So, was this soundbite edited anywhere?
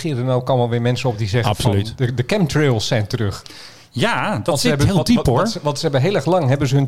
no; 0 cuts

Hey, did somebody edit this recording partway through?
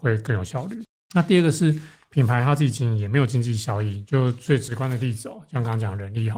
no; 0 cuts

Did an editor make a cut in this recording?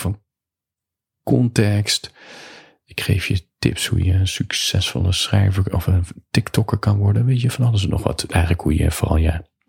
no; 0 cuts

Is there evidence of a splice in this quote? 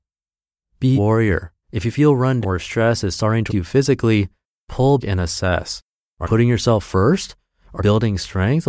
yes; 7 cuts; at 0.9 s, 1.6 s, 2.4 s, 3.5 s, 5.0 s, 6.2 s, 7.8 s

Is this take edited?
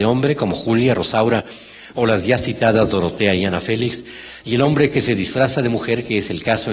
no; 0 cuts

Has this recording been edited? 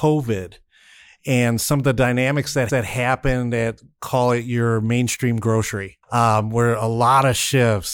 yes; 2 cuts; at 2.7 s, 6.0 s

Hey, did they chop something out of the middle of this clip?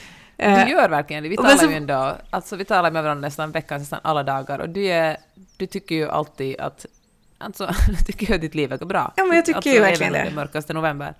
yes; 1 cut; at 8.8 s

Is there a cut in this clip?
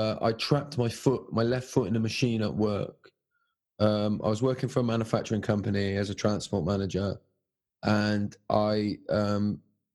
no; 0 cuts

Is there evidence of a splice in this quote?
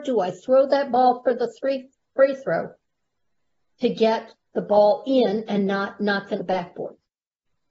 yes; 1 cut; at 6.4 s

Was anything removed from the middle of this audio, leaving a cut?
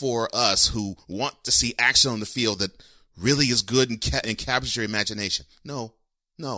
yes; 1 cut; at 4.2 s

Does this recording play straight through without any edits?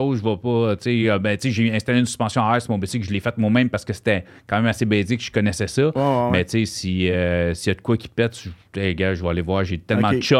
yes; 0 cuts

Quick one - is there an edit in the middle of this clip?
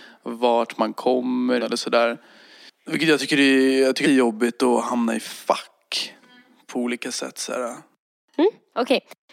yes; 2 cuts; at 1.6 s, 4.0 s

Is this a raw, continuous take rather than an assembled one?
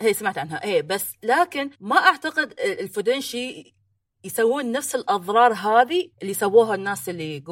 no; 2 cuts; at 1.7 s, 6.1 s

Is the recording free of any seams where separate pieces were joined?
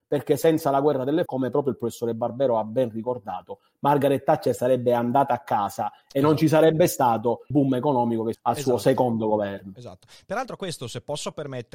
no; 3 cuts; at 1.3 s, 7.5 s, 8.3 s

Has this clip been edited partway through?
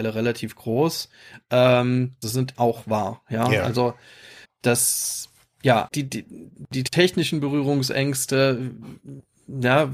yes; 4 cuts; at 2.2 s, 2.5 s, 4.4 s, 5.9 s

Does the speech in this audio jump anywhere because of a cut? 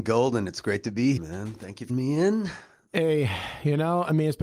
yes; 2 cuts; at 1.2 s, 1.9 s

